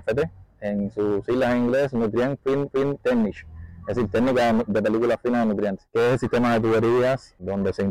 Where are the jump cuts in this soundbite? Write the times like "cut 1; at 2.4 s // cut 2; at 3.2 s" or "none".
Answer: cut 1; at 2.7 s